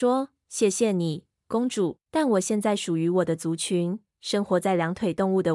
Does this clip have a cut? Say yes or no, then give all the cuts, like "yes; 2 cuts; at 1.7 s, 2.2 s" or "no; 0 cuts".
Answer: yes; 1 cut; at 2.0 s